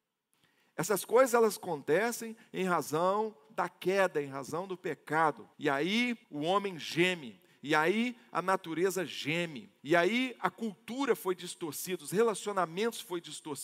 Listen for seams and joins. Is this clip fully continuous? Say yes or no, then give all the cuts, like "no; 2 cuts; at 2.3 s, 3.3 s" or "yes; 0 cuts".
no; 3 cuts; at 5.5 s, 6.2 s, 9.8 s